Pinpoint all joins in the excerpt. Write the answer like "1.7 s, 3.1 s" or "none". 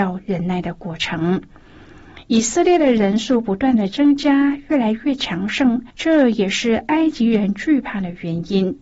5.9 s